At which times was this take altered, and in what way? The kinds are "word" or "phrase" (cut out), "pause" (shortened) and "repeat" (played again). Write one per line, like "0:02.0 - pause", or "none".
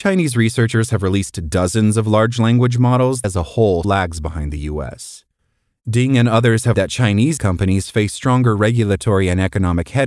0:03.2 - word
0:03.8 - word
0:06.7 - word
0:07.4 - word